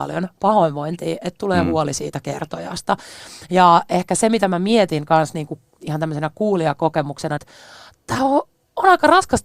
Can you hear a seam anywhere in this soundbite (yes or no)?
no